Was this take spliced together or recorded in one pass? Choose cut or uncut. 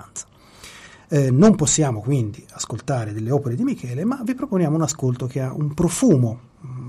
uncut